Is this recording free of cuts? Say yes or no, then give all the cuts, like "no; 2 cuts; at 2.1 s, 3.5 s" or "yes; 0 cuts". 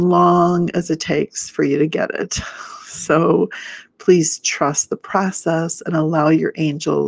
yes; 0 cuts